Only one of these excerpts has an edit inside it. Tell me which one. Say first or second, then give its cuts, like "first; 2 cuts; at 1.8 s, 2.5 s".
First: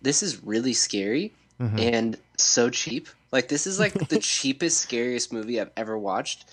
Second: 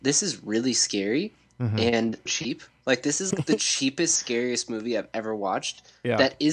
second; 2 cuts; at 2.3 s, 3.3 s